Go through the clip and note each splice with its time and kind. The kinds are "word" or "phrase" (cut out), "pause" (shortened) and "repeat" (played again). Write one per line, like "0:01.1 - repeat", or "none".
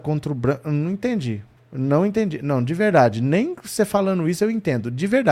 0:01.6 - pause

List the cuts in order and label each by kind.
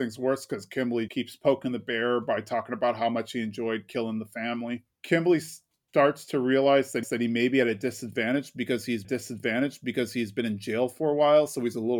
0:01.1 - word
0:04.9 - pause
0:07.0 - repeat
0:09.0 - repeat

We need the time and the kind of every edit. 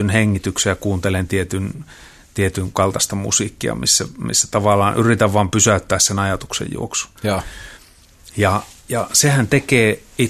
0:07.2 - pause

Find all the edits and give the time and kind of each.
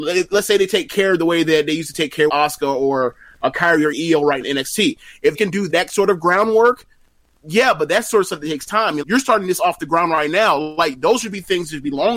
0:02.3 - word
0:03.9 - word
0:04.4 - word
0:05.3 - word
0:05.7 - word
0:09.0 - word

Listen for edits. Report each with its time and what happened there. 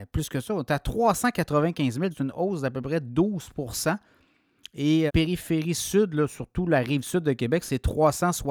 0:02.1 - word
0:05.1 - word

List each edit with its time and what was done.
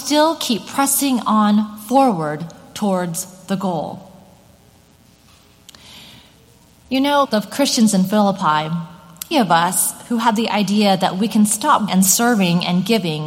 0:07.2 - word
0:09.3 - phrase
0:11.9 - word

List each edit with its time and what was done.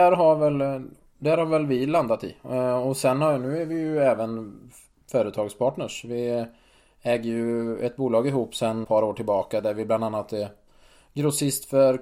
0:08.8 - word

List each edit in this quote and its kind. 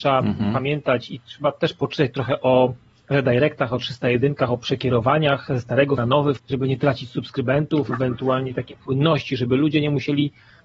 0:06.0 - word
0:06.4 - word

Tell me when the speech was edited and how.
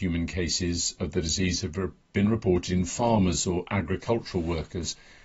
none

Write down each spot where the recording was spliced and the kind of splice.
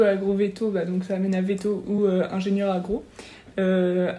none

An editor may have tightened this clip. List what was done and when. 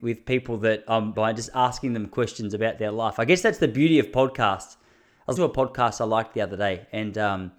0:01.1 - word
0:05.4 - word

